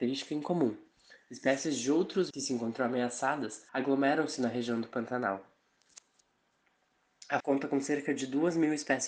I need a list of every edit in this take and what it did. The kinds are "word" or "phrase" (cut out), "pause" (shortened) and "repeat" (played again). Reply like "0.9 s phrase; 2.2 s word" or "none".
2.3 s word; 3.7 s pause; 7.4 s word